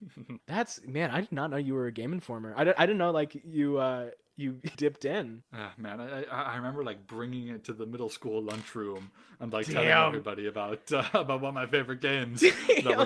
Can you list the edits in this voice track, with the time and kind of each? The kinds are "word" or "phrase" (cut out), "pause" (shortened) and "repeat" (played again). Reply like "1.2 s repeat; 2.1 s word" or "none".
4.7 s word